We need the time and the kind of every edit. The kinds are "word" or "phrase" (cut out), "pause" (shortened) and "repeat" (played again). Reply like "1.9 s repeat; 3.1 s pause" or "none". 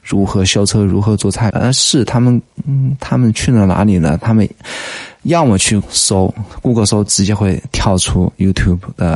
1.5 s phrase; 5.8 s word

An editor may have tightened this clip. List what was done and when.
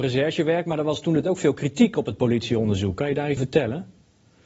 1.2 s word; 3.4 s word

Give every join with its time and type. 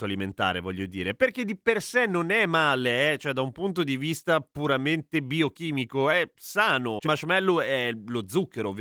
7.0 s phrase

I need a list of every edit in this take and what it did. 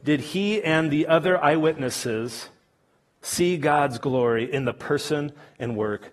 none

